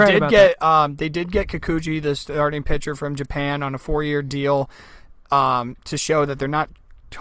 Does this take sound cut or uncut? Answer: uncut